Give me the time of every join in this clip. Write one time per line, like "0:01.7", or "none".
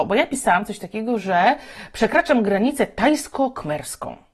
none